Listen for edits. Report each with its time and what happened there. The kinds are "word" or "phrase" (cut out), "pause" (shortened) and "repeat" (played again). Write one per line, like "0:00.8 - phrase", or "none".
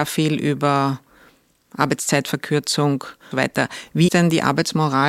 0:03.3 - phrase
0:04.1 - word